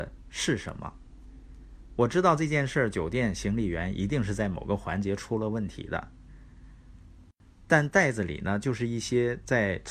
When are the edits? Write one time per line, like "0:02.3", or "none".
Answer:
none